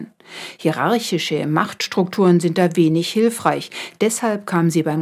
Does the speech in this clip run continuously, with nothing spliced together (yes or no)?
yes